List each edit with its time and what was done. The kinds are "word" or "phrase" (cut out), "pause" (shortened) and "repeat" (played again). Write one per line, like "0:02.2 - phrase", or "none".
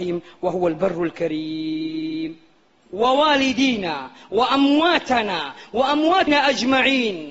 0:06.3 - word

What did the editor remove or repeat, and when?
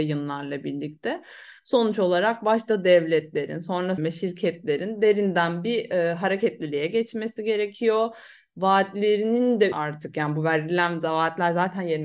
0:04.0 - word
0:09.7 - word

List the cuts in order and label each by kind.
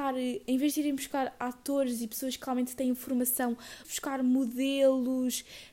0:03.8 - phrase

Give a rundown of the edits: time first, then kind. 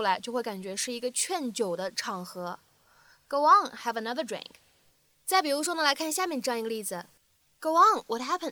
none

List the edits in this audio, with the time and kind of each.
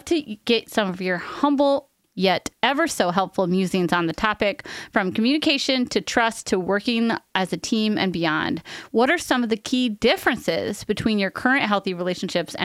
0:02.0 - pause

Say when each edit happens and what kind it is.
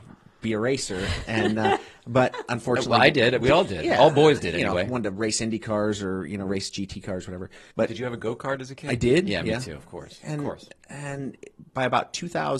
0:07.7 - pause
0:11.7 - pause

